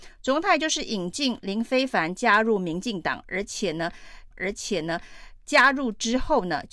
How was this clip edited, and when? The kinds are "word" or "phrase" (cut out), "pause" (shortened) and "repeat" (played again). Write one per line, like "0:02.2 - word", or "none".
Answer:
0:04.3 - repeat